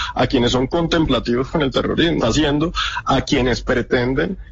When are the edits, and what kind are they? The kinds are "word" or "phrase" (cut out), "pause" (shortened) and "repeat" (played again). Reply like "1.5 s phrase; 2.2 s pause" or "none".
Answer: 2.2 s phrase

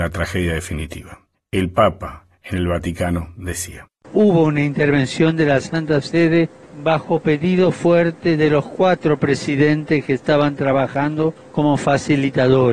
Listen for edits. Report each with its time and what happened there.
none

